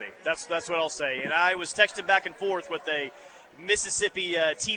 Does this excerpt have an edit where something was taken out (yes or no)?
no